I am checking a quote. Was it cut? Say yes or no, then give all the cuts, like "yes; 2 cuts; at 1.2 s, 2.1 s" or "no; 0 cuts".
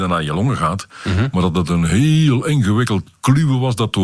no; 0 cuts